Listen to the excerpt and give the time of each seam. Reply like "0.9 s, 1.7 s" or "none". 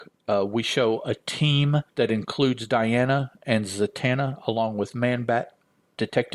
1.9 s